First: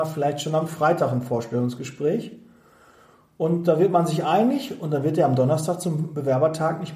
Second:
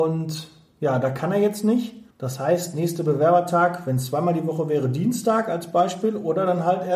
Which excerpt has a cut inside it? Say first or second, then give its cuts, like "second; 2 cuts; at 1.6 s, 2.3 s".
second; 1 cut; at 2.1 s